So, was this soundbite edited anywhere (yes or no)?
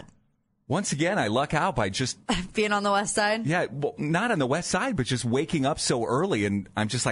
no